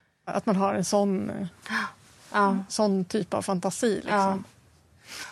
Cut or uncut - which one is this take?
uncut